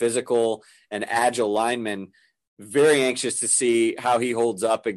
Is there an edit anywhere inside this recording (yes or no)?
no